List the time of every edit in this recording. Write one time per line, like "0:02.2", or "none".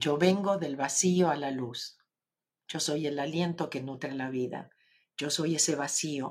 none